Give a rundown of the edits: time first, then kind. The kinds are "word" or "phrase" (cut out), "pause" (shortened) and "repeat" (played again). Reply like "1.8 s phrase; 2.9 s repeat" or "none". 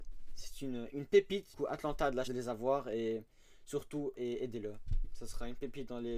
1.5 s word; 2.3 s word; 4.2 s word